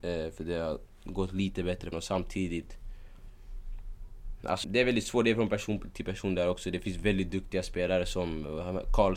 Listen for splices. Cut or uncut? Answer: cut